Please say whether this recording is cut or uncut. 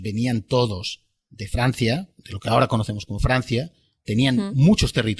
uncut